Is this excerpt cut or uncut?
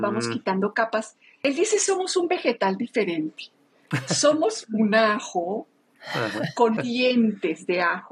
cut